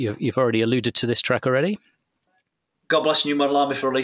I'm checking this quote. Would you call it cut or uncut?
uncut